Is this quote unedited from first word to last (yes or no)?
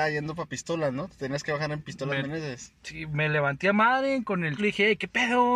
no